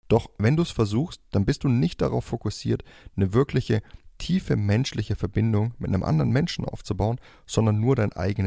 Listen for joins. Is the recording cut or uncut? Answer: uncut